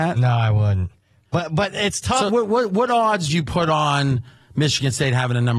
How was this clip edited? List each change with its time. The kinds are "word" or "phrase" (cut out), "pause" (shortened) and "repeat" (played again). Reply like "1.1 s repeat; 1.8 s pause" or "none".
2.3 s word; 3.3 s word